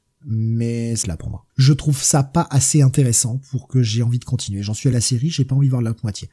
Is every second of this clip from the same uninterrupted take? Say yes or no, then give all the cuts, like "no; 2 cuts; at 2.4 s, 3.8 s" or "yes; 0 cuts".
no; 3 cuts; at 1.0 s, 1.5 s, 4.9 s